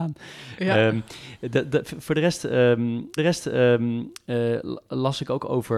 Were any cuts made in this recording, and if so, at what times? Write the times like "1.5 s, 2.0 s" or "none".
3.2 s